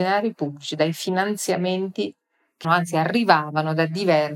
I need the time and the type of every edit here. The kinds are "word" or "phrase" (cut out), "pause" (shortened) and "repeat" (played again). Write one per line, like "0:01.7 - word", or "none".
0:02.6 - word